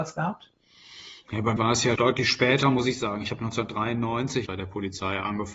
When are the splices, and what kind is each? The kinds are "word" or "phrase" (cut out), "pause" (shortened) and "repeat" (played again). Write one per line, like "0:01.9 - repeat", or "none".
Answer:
0:01.6 - word
0:02.0 - word
0:04.5 - word